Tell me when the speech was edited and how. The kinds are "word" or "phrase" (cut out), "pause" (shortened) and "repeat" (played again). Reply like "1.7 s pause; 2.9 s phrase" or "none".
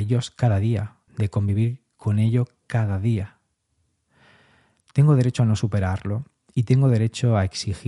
1.1 s pause